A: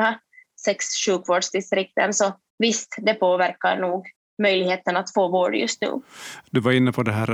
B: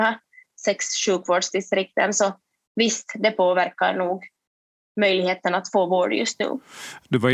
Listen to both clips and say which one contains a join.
A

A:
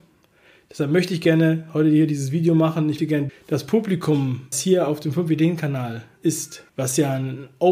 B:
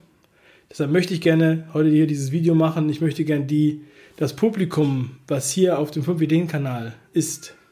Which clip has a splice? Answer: A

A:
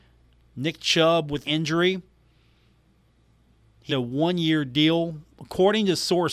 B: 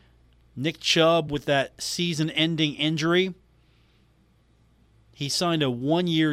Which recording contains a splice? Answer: A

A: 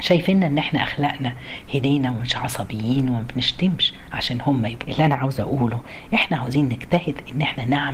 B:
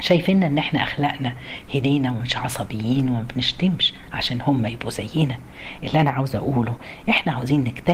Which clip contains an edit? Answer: A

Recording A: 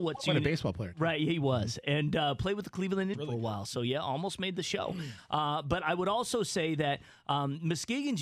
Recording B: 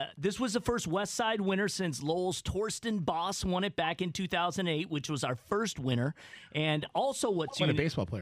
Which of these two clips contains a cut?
A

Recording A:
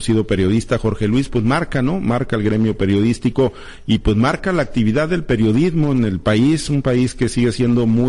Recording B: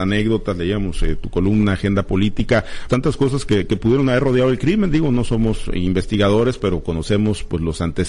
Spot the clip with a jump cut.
B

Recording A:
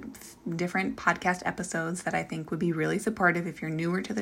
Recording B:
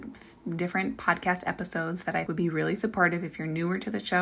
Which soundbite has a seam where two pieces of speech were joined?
B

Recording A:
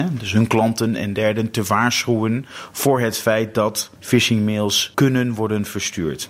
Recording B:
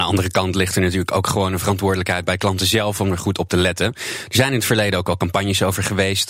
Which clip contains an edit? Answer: A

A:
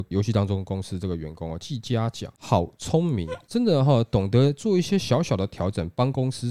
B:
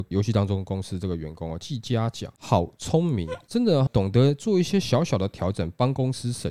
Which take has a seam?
B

